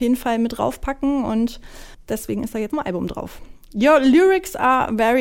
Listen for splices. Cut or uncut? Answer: cut